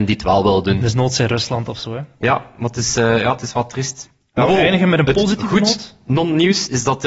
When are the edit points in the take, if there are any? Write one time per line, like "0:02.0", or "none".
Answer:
none